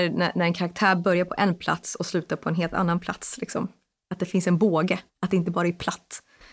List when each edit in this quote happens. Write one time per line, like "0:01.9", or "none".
0:05.1